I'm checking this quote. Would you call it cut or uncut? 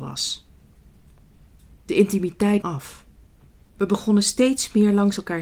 cut